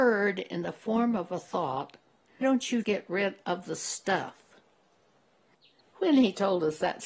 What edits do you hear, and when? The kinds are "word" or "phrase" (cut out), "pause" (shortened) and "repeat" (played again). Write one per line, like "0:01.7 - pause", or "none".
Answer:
0:02.4 - word
0:02.8 - word